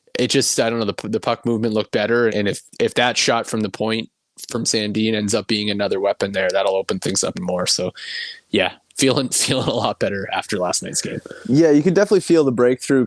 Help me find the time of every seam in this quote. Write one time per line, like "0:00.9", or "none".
0:02.3
0:07.3